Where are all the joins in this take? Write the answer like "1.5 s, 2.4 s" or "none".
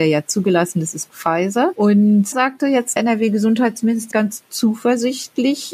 1.1 s, 2.3 s, 3.0 s, 4.1 s